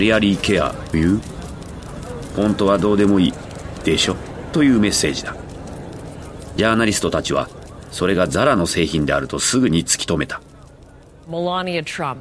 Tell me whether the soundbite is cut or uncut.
cut